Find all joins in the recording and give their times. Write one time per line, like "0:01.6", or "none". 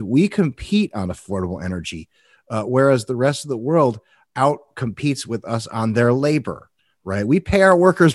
none